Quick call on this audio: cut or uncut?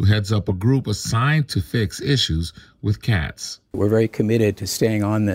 uncut